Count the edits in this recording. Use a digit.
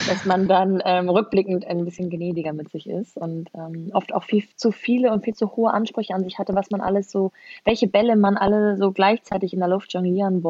1